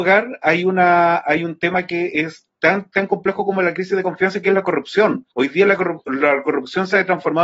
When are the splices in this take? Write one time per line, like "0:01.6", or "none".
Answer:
0:05.3